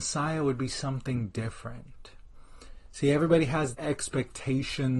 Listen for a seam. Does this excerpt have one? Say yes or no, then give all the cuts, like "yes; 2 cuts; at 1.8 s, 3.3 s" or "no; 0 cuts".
yes; 1 cut; at 3.7 s